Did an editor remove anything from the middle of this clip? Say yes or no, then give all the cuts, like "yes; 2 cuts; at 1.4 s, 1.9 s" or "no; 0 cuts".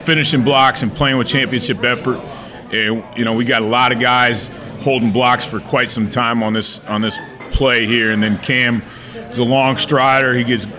no; 0 cuts